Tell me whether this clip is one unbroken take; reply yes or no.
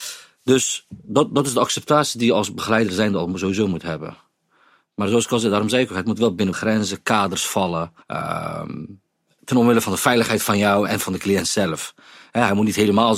no